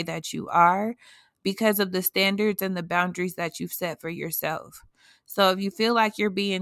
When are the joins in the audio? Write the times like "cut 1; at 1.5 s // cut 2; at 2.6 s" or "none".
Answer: none

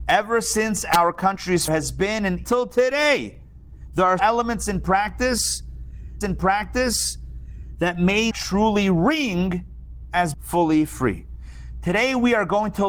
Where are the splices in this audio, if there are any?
cut 1; at 1.7 s // cut 2; at 2.4 s // cut 3; at 4.2 s // cut 4; at 6.2 s // cut 5; at 8.3 s // cut 6; at 10.3 s

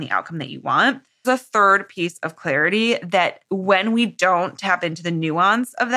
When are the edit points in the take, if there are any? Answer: cut 1; at 1.2 s // cut 2; at 3.4 s

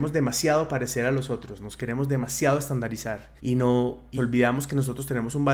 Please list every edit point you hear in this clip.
cut 1; at 3.4 s // cut 2; at 4.2 s

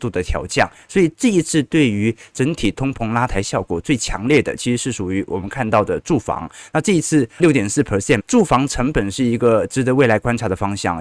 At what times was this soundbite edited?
cut 1; at 7.4 s // cut 2; at 8.2 s

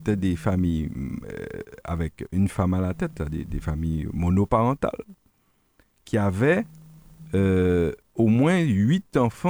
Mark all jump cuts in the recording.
none

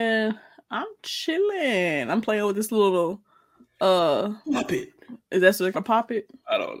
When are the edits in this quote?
cut 1; at 5.2 s // cut 2; at 5.7 s

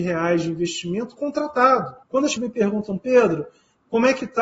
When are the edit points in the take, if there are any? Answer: cut 1; at 2.0 s // cut 2; at 2.4 s

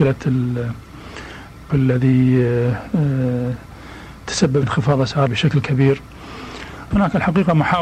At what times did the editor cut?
cut 1; at 1.7 s // cut 2; at 4.6 s // cut 3; at 5.3 s // cut 4; at 6.9 s

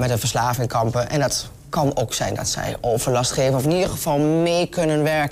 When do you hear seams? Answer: none

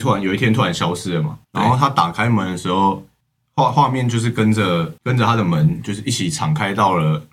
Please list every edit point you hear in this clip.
cut 1; at 1.4 s // cut 2; at 3.2 s // cut 3; at 5.0 s

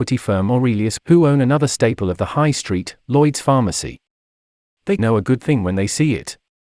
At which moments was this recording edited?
cut 1; at 1.0 s // cut 2; at 5.0 s

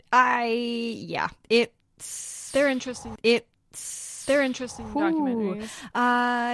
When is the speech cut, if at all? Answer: cut 1; at 3.2 s

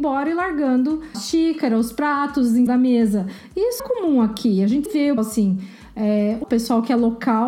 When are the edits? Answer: cut 1; at 1.1 s // cut 2; at 2.7 s // cut 3; at 3.8 s // cut 4; at 4.9 s // cut 5; at 5.2 s // cut 6; at 6.4 s

